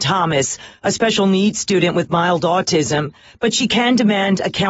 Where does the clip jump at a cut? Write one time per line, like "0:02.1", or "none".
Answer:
none